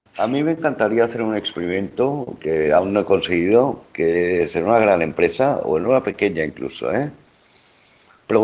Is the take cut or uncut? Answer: uncut